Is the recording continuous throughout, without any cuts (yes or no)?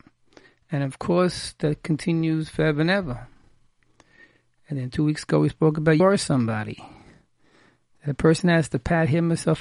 no